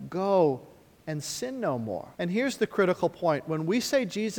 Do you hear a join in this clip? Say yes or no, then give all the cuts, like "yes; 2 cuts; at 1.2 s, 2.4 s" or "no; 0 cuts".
yes; 1 cut; at 2.1 s